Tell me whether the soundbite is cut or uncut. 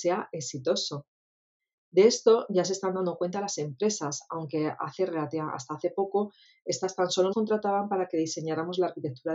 cut